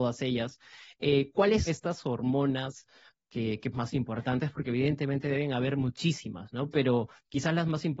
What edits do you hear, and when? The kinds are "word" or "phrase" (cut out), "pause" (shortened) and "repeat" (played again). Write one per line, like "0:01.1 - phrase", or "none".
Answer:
0:01.7 - word
0:03.7 - phrase